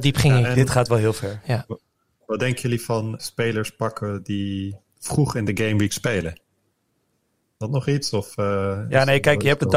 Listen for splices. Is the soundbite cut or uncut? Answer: cut